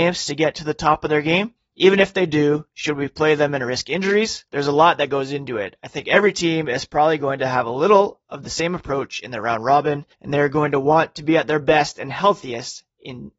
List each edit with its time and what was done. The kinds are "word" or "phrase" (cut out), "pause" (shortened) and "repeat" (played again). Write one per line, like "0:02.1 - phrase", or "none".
0:01.6 - pause
0:04.5 - pause
0:10.1 - pause